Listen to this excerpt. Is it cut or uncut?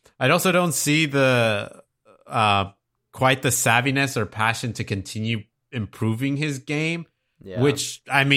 uncut